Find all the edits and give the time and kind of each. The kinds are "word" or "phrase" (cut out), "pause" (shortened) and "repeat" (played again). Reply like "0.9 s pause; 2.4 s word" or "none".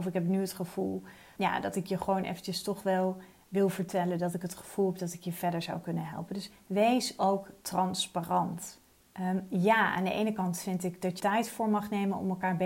1.4 s word; 8.9 s pause; 11.2 s word